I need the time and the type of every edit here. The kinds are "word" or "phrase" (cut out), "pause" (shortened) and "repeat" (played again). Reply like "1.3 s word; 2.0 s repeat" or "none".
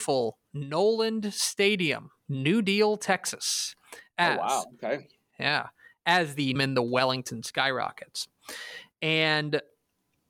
2.3 s word; 6.6 s phrase

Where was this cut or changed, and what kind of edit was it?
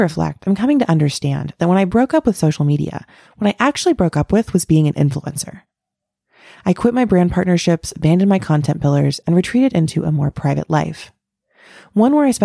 none

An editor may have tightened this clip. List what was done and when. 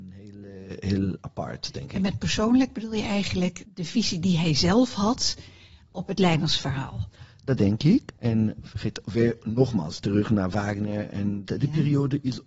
3.6 s word; 8.2 s pause; 11.4 s word

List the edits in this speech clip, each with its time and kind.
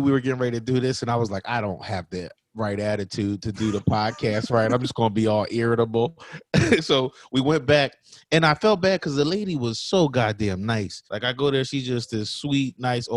11.1 s pause

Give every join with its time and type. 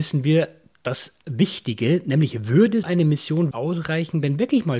2.8 s word; 3.5 s word

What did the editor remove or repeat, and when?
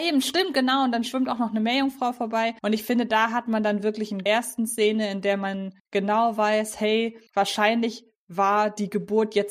2.6 s pause; 4.3 s phrase; 5.8 s pause; 7.3 s pause

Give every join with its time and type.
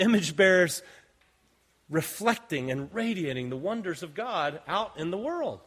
none

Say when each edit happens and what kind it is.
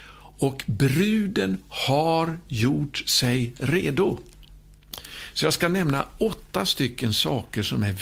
none

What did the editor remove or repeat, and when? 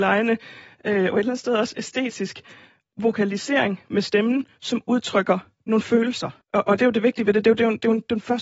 6.4 s pause

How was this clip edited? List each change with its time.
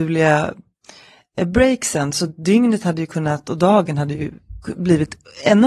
none

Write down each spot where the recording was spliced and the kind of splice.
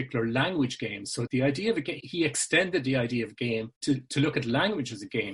1.3 s word; 2.0 s word; 3.8 s pause

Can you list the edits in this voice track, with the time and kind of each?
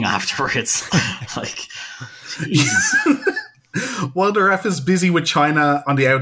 none

